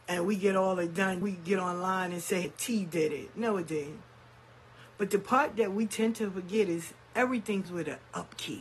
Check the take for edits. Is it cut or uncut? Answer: cut